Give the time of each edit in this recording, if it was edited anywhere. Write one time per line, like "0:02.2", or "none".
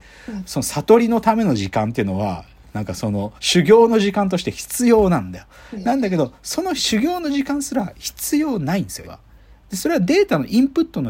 0:03.4
0:09.0
0:09.5